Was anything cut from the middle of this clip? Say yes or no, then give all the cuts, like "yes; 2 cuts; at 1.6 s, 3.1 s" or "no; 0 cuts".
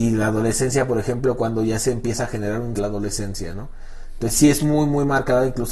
yes; 1 cut; at 2.7 s